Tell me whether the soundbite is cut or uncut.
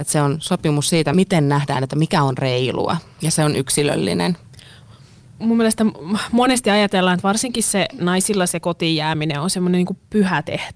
uncut